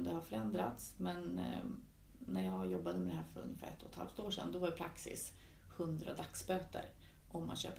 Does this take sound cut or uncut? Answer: uncut